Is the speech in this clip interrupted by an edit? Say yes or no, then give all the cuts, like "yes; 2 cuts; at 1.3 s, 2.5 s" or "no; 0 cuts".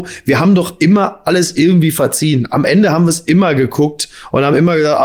no; 0 cuts